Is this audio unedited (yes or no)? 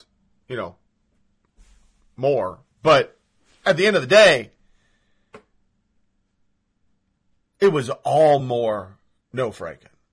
yes